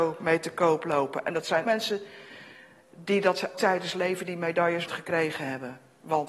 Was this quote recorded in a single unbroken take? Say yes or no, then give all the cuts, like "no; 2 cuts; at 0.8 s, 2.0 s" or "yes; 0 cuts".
no; 3 cuts; at 1.6 s, 3.5 s, 4.9 s